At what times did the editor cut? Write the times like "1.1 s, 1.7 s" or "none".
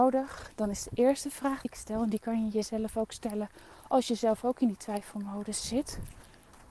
1.6 s

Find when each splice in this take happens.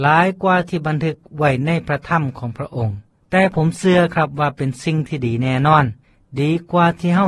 3.2 s, 6.0 s

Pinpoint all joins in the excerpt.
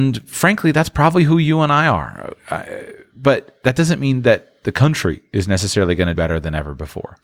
6.1 s

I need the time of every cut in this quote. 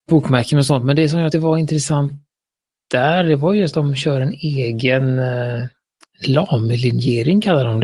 1.3 s, 3.7 s

